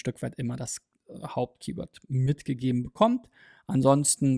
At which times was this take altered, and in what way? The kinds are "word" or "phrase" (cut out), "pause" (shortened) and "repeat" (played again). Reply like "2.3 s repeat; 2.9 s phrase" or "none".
none